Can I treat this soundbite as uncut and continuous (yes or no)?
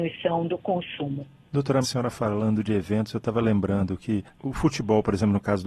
no